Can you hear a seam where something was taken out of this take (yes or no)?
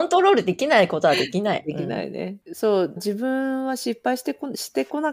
yes